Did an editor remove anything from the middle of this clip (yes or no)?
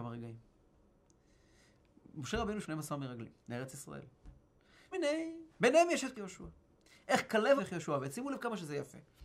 yes